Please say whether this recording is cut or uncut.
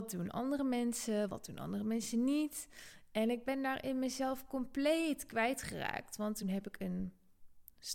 uncut